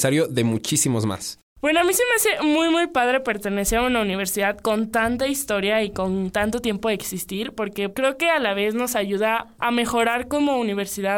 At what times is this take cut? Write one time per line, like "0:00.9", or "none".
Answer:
0:01.5